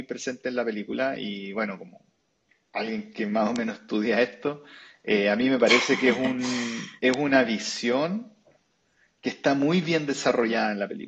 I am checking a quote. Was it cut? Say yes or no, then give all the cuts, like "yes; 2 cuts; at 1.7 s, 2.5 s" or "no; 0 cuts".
no; 0 cuts